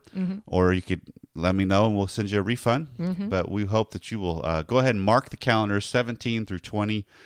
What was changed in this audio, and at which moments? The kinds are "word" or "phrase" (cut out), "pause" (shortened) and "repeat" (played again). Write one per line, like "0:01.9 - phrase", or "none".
none